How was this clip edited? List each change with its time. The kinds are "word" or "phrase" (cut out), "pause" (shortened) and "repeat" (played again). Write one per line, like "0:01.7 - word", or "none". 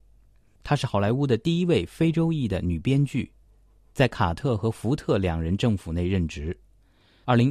none